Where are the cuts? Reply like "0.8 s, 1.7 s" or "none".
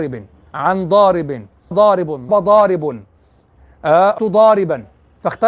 1.7 s, 2.3 s, 4.2 s